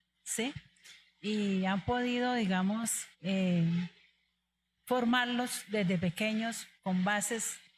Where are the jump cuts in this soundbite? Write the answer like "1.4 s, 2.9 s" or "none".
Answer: 3.1 s, 6.8 s